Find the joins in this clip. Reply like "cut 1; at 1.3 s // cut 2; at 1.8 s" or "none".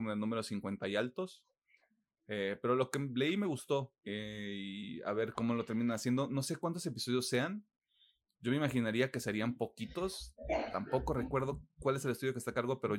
cut 1; at 4.0 s // cut 2; at 5.3 s